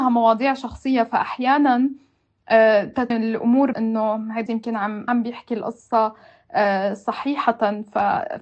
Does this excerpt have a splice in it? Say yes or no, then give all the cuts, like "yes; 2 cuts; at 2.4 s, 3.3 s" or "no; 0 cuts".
yes; 4 cuts; at 3.1 s, 3.7 s, 4.5 s, 5.1 s